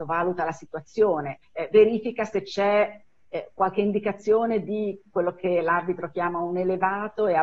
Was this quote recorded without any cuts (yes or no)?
no